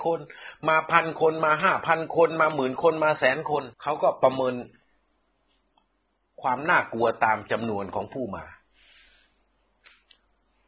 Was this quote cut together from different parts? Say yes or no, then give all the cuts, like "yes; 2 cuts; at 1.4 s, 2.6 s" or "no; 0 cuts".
yes; 1 cut; at 3.7 s